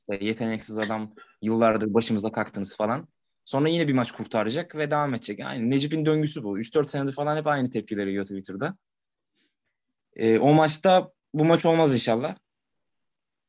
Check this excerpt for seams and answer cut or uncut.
uncut